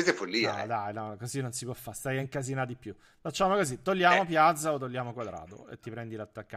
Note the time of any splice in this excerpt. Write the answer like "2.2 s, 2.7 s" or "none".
none